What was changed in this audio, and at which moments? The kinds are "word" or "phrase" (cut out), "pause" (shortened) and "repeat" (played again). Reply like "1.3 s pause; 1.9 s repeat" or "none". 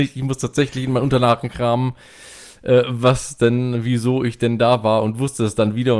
none